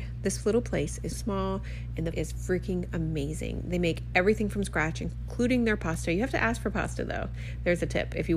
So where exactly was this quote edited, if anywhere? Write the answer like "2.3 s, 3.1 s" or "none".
1.1 s, 2.1 s